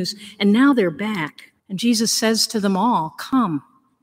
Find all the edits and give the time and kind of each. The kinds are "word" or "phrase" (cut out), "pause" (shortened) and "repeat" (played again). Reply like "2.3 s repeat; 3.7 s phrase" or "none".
1.6 s pause